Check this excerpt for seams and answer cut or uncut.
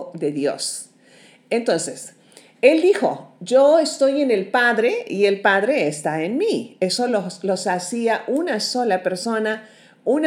uncut